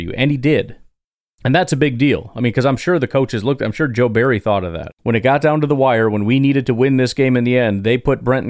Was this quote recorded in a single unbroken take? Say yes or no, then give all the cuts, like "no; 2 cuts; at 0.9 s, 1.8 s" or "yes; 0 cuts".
yes; 0 cuts